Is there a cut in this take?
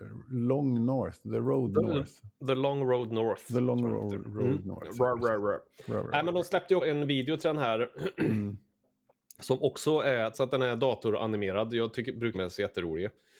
yes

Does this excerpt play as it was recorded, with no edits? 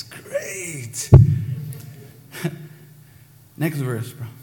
yes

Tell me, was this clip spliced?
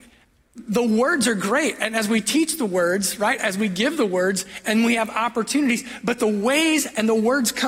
no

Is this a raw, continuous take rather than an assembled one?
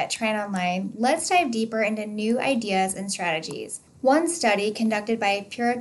yes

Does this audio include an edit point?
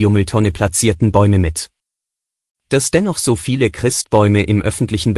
no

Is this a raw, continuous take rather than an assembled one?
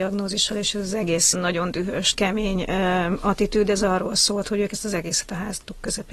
no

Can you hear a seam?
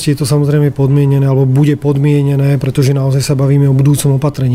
no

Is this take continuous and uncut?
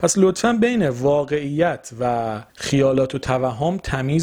no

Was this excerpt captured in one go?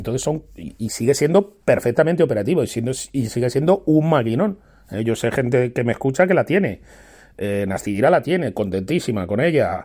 yes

